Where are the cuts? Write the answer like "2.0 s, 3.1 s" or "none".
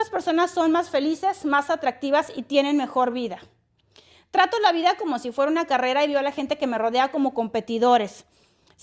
none